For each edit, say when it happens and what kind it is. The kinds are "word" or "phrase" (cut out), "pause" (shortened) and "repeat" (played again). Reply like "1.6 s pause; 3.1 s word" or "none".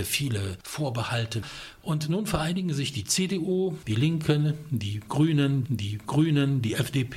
5.6 s repeat